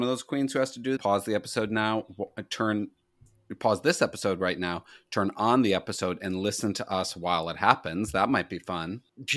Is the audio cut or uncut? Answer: cut